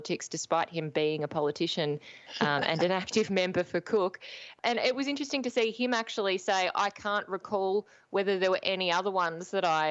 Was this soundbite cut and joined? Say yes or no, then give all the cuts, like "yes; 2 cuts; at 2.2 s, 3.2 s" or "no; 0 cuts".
no; 0 cuts